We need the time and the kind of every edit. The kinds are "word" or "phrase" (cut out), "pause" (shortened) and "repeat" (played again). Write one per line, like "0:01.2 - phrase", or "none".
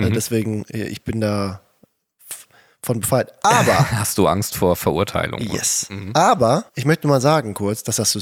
0:06.7 - pause